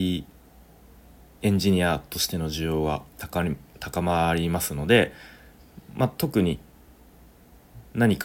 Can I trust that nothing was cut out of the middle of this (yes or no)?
no